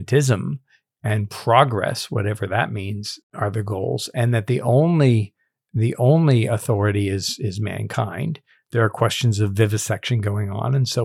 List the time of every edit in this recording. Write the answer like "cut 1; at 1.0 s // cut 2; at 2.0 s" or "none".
none

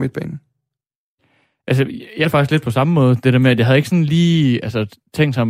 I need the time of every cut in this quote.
cut 1; at 2.2 s

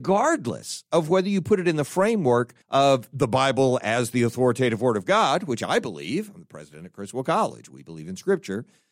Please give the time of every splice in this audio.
cut 1; at 2.6 s

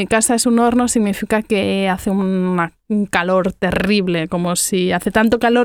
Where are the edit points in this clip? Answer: none

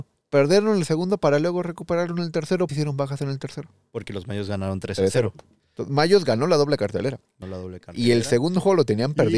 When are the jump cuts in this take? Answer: cut 1; at 2.7 s // cut 2; at 7.4 s

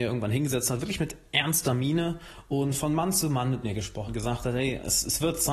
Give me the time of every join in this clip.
cut 1; at 4.1 s

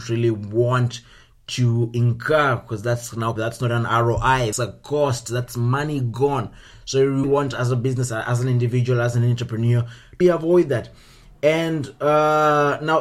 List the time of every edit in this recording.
cut 1; at 3.4 s // cut 2; at 4.5 s // cut 3; at 7.2 s // cut 4; at 10.2 s

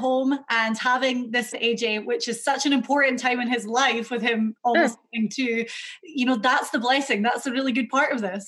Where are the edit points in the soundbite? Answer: cut 1; at 1.5 s

